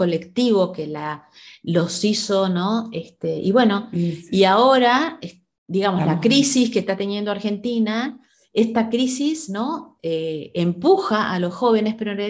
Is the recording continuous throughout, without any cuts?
yes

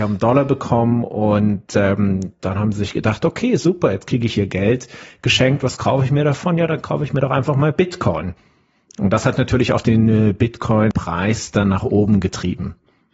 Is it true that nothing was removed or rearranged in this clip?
yes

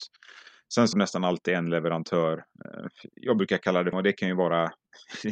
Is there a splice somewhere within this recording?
yes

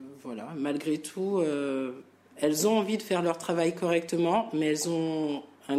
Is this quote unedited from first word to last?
yes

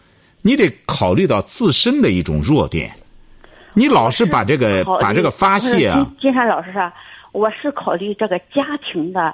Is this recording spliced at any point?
no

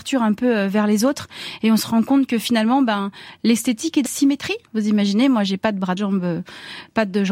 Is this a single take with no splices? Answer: no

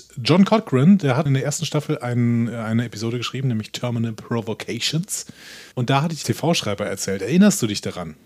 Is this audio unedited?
no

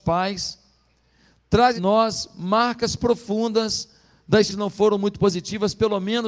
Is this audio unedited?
no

